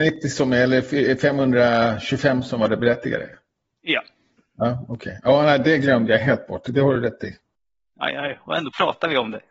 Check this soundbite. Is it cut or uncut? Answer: uncut